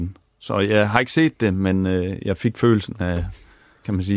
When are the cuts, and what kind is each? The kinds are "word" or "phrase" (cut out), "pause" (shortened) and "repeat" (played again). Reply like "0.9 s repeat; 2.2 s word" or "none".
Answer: none